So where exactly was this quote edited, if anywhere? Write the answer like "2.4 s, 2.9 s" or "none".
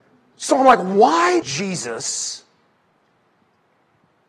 1.4 s